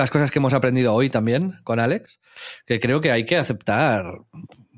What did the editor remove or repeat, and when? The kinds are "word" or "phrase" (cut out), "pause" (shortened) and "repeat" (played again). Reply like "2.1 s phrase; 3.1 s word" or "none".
none